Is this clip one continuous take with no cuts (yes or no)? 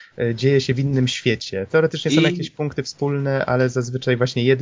yes